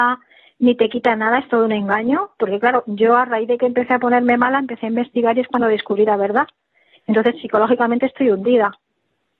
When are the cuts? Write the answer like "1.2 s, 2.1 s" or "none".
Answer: none